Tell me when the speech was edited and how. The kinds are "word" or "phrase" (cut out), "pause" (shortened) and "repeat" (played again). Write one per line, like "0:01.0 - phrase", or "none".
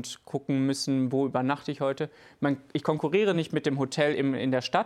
none